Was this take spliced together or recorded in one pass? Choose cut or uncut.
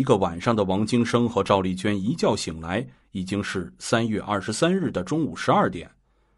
uncut